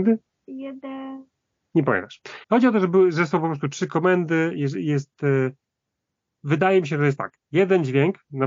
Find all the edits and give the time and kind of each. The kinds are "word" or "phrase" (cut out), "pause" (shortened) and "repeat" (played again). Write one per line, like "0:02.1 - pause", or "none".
0:02.4 - pause